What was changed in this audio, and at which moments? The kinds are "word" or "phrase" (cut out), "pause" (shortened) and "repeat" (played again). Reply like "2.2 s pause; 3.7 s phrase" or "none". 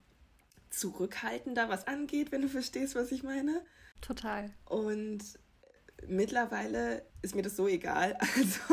1.8 s phrase; 3.9 s pause; 7.1 s pause